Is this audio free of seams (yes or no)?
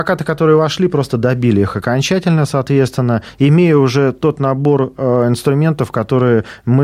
yes